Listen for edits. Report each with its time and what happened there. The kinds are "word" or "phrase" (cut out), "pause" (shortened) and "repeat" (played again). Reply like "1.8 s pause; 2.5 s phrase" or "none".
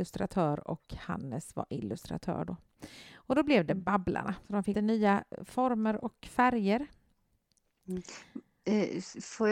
4.7 s word